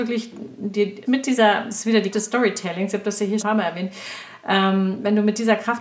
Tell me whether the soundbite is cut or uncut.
cut